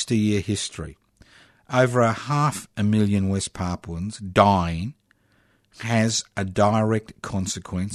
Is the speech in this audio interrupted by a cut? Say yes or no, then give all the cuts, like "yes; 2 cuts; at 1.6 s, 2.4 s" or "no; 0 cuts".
no; 0 cuts